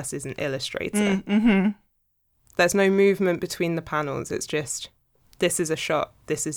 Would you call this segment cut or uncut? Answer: uncut